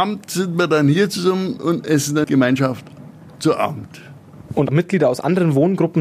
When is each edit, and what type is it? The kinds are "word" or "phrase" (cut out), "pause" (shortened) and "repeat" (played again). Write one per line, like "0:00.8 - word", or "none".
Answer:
0:02.2 - word